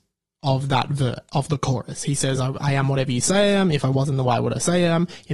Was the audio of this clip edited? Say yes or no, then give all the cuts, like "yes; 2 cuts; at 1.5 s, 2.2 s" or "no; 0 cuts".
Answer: no; 0 cuts